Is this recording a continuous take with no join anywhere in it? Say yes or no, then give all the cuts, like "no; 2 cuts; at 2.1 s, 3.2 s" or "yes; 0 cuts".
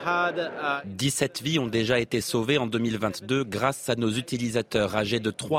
yes; 0 cuts